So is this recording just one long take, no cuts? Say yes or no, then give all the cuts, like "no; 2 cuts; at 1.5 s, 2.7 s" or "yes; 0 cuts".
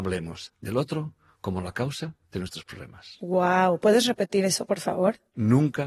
yes; 0 cuts